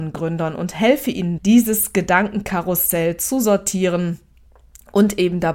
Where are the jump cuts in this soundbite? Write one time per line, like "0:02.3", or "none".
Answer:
0:01.4